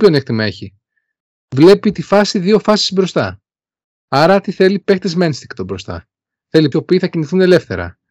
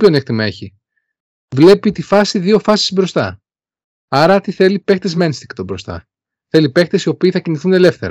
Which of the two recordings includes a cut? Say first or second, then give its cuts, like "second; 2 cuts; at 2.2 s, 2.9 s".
first; 1 cut; at 6.7 s